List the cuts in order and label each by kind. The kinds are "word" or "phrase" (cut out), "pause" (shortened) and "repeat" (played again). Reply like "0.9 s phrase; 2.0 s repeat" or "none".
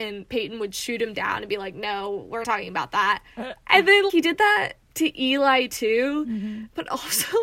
2.4 s word; 3.3 s pause; 4.1 s word; 4.8 s pause